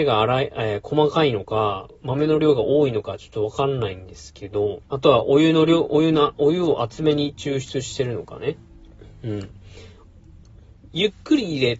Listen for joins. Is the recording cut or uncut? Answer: cut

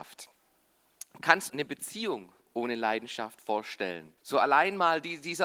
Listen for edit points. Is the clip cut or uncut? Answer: cut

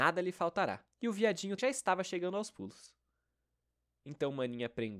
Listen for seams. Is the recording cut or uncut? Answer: cut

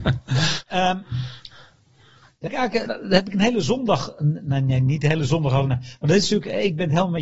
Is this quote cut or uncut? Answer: cut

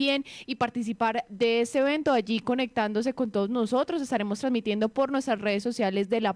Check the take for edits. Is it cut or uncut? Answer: uncut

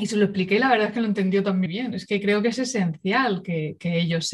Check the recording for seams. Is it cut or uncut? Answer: cut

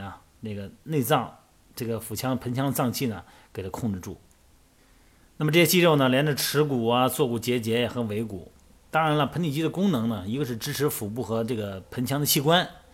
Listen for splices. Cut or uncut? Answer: uncut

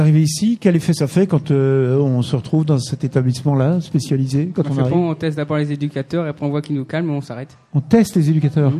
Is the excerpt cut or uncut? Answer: uncut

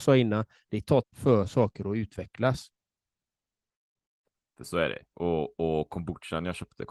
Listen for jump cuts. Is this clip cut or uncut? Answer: cut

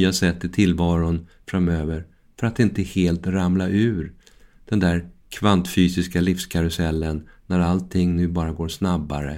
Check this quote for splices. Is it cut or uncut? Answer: uncut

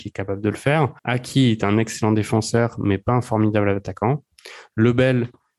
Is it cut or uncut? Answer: cut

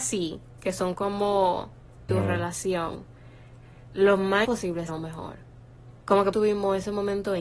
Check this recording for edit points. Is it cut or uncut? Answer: cut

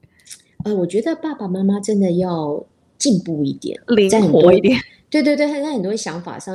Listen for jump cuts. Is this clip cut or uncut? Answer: uncut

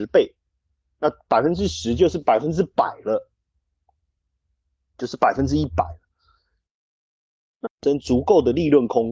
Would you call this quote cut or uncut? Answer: cut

